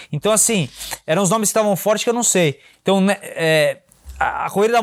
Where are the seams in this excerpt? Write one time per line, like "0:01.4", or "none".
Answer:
none